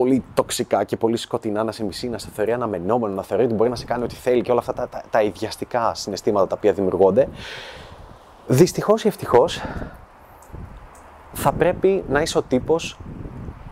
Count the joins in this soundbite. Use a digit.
0